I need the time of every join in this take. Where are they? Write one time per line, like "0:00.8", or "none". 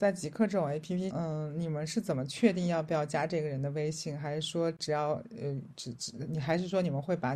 0:01.1